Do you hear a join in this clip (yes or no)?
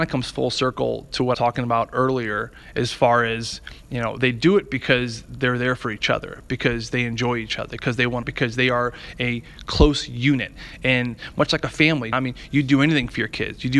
yes